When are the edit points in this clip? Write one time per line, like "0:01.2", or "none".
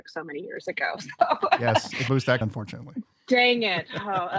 0:02.1
0:02.4